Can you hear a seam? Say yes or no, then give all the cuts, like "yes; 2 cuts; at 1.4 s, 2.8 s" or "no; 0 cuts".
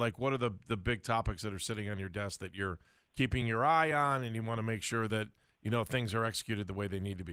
no; 0 cuts